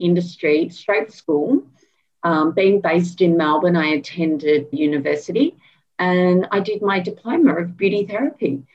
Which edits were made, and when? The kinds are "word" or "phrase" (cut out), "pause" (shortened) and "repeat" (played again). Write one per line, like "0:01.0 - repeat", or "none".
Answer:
0:01.1 - word
0:04.7 - word